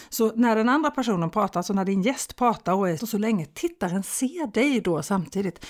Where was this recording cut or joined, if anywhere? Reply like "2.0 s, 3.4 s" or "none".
3.0 s